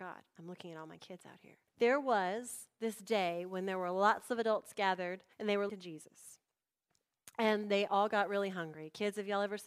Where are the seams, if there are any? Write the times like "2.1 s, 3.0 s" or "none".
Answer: 1.7 s, 5.3 s, 5.7 s